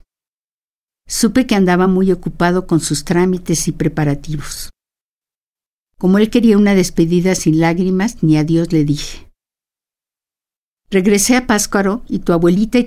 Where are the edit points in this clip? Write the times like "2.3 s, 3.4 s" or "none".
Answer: none